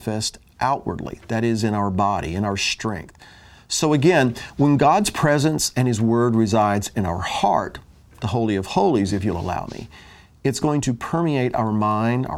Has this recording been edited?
no; 0 cuts

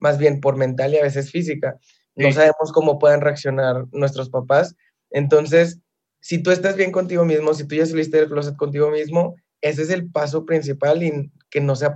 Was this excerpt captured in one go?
yes; 0 cuts

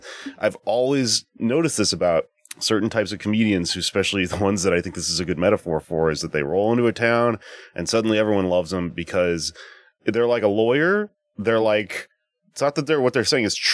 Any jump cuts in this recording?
no; 0 cuts

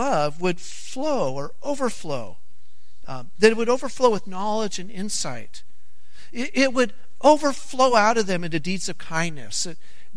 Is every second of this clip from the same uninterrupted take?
yes; 0 cuts

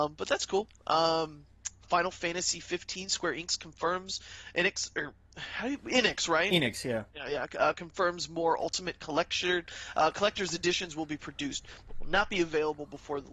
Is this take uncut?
no; 2 cuts; at 1.8 s, 7.1 s

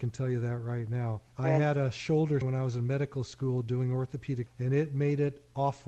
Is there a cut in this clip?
yes; 3 cuts; at 1.3 s, 2.4 s, 4.5 s

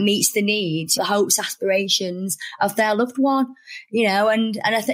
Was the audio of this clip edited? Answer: yes; 1 cut; at 1.0 s

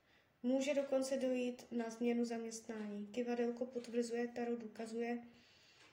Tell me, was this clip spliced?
no; 0 cuts

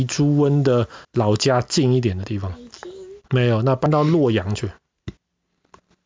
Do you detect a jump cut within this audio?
yes; 2 cuts; at 1.0 s, 3.2 s

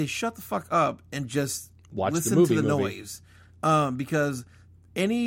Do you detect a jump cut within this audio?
no; 0 cuts

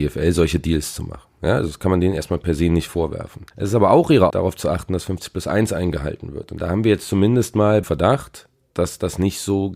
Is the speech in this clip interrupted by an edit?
yes; 3 cuts; at 3.5 s, 4.3 s, 7.8 s

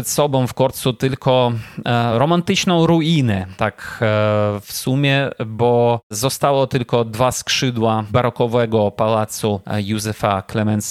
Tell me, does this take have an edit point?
no; 0 cuts

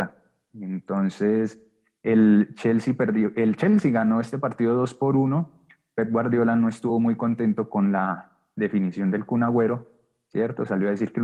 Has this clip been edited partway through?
no; 0 cuts

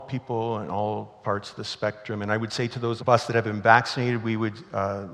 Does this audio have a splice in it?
yes; 1 cut; at 3.0 s

